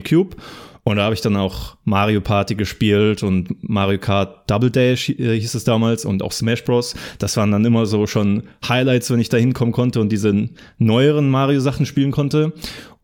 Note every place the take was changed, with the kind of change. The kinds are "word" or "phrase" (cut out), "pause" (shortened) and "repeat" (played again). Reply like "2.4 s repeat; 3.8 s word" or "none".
none